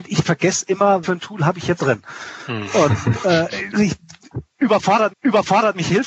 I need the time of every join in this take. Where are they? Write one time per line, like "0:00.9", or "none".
0:01.0
0:01.8
0:03.7
0:05.1